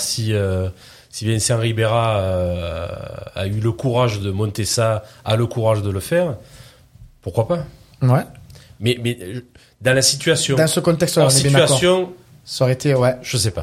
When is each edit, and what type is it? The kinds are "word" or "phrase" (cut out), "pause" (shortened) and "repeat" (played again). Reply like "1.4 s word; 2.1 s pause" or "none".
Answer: 4.2 s word